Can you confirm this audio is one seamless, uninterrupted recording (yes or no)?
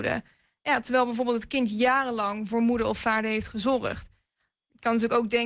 yes